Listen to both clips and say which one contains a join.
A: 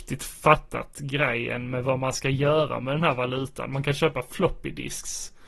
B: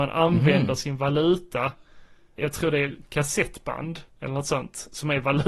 B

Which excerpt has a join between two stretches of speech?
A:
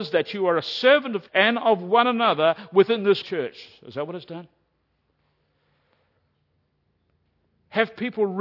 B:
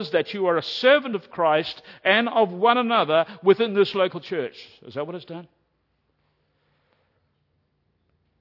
A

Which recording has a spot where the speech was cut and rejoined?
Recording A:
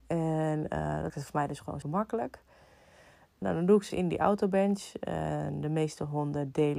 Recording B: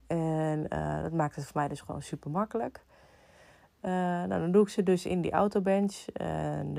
A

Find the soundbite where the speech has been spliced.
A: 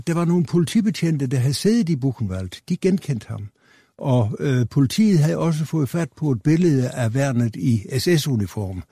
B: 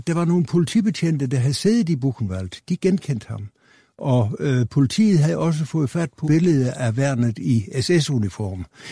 B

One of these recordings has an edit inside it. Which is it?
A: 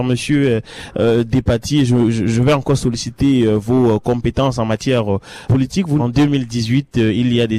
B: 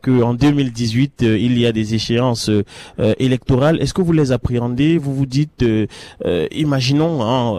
A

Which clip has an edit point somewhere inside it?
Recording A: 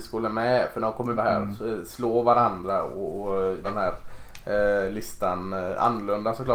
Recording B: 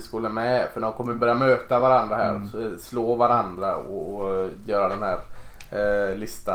A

